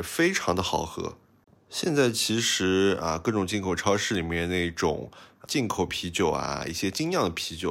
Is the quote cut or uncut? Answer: cut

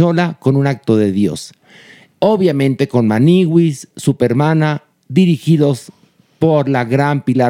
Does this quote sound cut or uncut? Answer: uncut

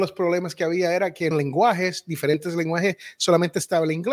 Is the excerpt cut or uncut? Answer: cut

